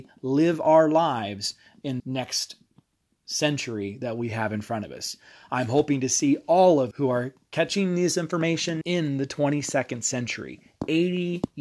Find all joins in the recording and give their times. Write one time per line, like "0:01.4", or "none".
0:02.0
0:06.9
0:08.8